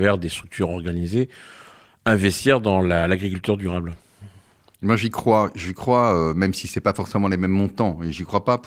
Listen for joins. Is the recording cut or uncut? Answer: uncut